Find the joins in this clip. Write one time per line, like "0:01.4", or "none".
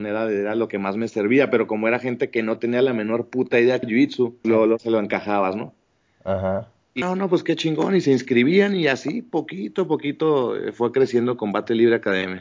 0:03.8
0:04.4
0:07.0